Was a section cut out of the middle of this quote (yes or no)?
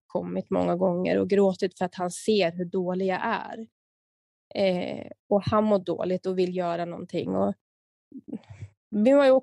no